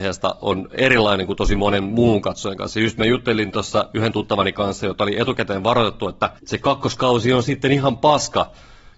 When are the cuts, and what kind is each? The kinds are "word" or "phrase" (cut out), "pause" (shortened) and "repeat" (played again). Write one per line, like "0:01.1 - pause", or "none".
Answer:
0:06.4 - pause